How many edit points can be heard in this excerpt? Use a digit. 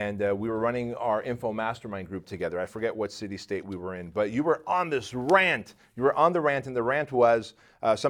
0